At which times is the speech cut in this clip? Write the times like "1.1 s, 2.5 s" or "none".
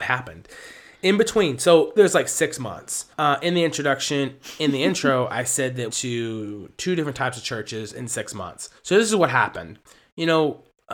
2.0 s, 3.1 s, 5.9 s, 8.8 s